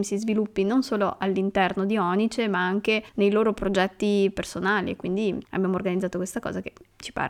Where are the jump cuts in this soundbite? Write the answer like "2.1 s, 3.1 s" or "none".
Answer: 3.1 s, 5.4 s